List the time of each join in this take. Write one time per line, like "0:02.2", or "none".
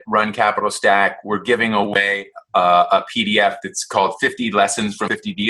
none